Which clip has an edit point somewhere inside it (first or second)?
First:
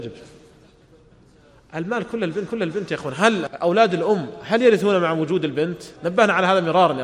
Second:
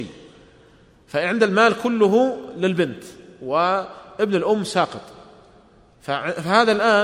first